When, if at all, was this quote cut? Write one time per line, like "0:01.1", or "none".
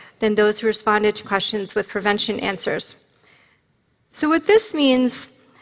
0:01.2

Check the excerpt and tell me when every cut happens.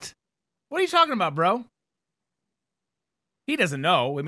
none

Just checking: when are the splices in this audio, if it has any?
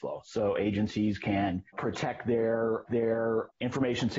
0:02.9

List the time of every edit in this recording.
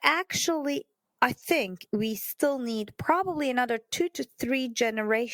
none

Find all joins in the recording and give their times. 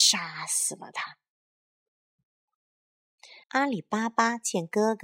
0:03.4

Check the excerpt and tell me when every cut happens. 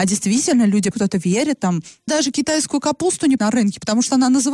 0:00.9
0:02.1
0:03.4

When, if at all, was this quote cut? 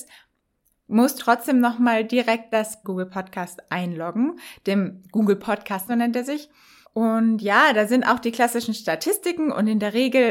0:01.2
0:02.5
0:02.8
0:05.9
0:06.8

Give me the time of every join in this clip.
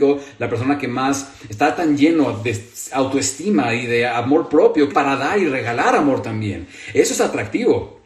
0:04.9

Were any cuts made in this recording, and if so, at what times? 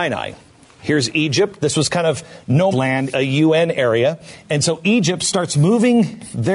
0:02.7
0:03.1

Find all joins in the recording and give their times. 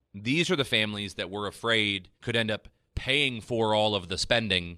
0:02.1

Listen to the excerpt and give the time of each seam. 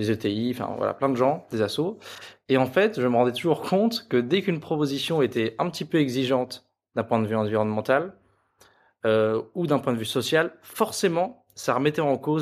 none

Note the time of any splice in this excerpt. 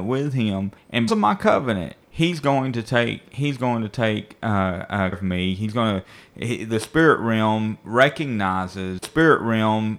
0:01.1
0:05.1
0:09.0

